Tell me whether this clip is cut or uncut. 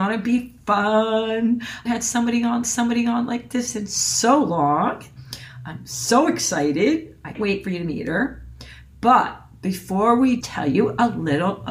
cut